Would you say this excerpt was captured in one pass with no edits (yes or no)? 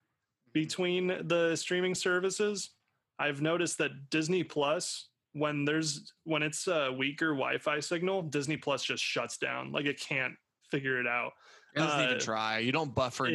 yes